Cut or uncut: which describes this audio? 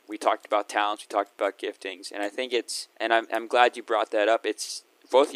cut